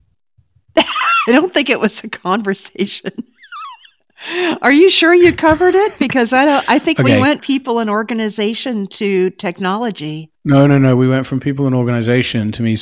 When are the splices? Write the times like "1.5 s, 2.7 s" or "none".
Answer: 7.4 s, 10.4 s